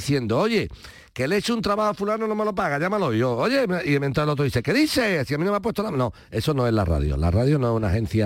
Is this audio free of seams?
yes; 0 cuts

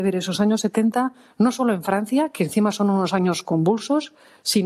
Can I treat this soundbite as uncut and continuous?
yes; 0 cuts

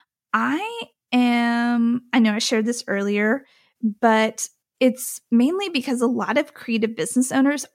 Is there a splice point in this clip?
no; 0 cuts

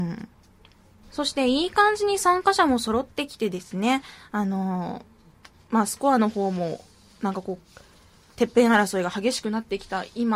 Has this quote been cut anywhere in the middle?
no; 0 cuts

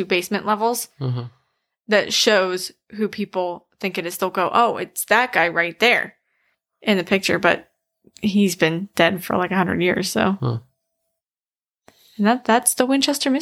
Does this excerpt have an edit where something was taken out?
no; 0 cuts

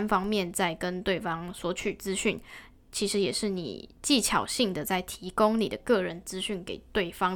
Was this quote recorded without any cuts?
yes; 0 cuts

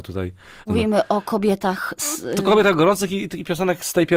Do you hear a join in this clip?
no; 0 cuts

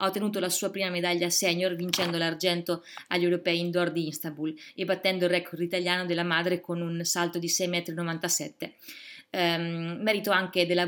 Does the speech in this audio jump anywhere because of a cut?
no; 0 cuts

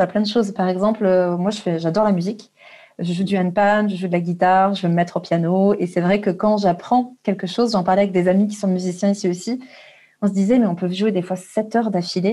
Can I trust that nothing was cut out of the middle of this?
yes; 0 cuts

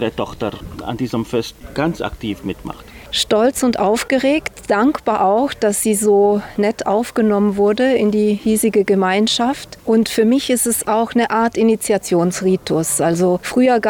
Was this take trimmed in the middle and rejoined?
no; 0 cuts

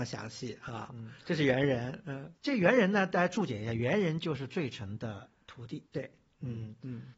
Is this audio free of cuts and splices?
no; 2 cuts; at 2.4 s, 5.9 s

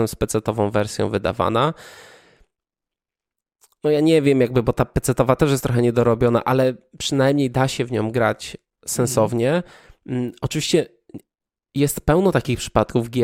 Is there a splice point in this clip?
no; 0 cuts

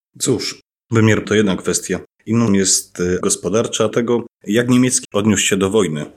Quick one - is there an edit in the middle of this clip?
yes; 5 cuts; at 1.2 s, 2.5 s, 3.2 s, 3.9 s, 5.0 s

